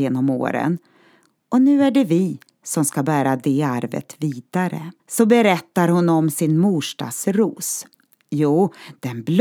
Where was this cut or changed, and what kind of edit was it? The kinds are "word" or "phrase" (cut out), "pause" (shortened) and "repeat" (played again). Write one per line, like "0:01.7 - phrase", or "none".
0:05.0 - pause

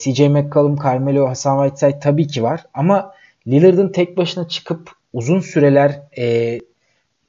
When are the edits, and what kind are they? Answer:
none

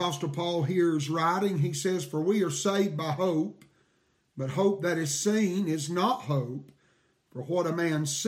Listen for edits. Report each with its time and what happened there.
none

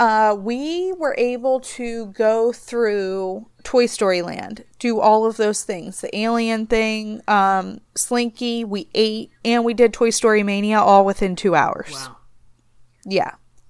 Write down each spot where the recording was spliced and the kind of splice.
0:07.9 - pause

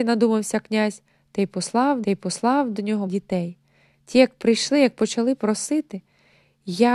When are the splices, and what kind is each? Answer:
0:02.0 - repeat
0:03.1 - word

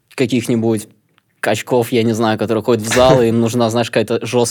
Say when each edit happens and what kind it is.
0:01.0 - pause

